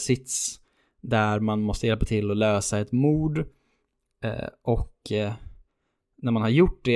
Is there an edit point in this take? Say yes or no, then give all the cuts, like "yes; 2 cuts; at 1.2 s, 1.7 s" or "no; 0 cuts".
no; 0 cuts